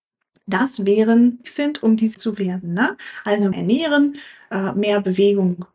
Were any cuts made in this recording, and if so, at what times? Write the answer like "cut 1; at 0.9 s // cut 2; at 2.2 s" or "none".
cut 1; at 1.4 s // cut 2; at 2.1 s // cut 3; at 3.5 s